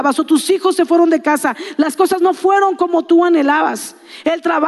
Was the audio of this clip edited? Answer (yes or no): no